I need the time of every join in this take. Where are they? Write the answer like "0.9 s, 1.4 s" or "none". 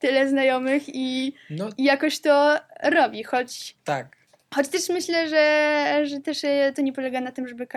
none